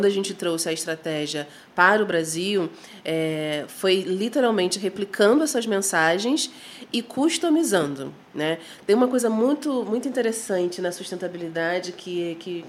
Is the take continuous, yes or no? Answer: yes